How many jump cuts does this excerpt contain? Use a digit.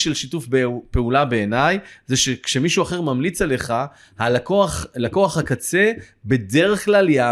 0